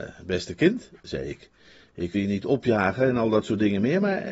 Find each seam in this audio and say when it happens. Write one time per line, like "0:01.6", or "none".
0:02.1